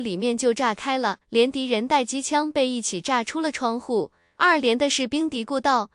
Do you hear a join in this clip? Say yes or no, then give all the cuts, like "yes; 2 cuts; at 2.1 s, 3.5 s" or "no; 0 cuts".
yes; 1 cut; at 1.2 s